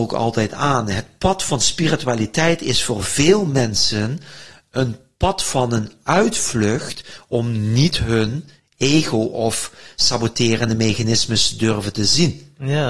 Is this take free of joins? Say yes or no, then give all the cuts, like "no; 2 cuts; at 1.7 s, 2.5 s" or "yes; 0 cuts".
yes; 0 cuts